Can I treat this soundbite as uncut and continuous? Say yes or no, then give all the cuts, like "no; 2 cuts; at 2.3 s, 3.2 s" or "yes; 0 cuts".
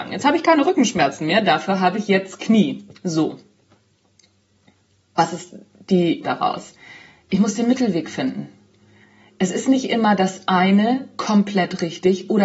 no; 1 cut; at 6.2 s